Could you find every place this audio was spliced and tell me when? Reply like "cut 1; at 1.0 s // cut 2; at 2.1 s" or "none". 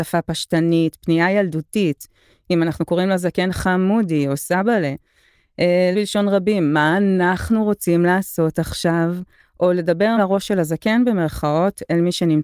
cut 1; at 5.9 s // cut 2; at 10.2 s